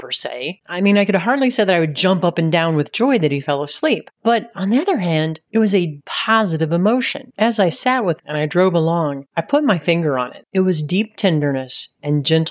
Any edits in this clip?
yes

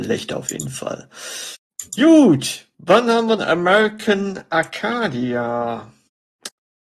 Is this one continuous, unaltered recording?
no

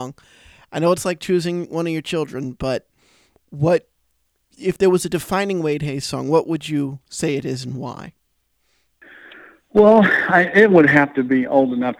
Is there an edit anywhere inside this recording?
yes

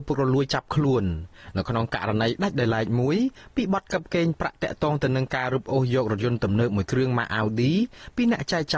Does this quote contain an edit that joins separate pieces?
no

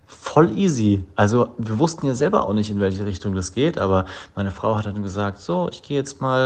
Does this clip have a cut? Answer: no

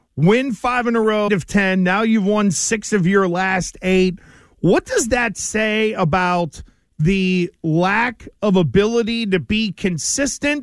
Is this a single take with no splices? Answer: no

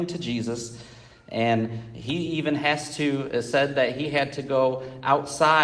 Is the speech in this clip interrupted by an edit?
no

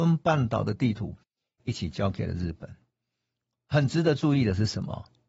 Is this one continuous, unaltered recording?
yes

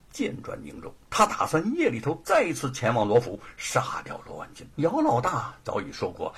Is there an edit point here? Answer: yes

